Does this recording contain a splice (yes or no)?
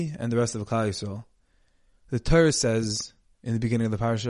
no